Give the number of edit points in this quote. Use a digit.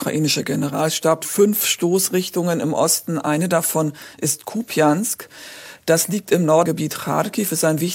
2